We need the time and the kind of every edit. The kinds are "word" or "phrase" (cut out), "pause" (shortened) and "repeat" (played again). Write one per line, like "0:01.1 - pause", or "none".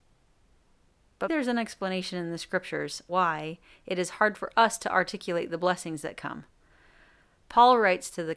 0:01.3 - word
0:03.1 - word